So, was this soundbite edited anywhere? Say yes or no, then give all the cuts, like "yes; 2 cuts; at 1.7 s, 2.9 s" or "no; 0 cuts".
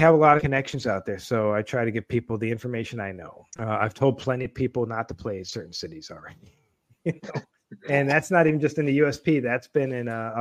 yes; 1 cut; at 3.5 s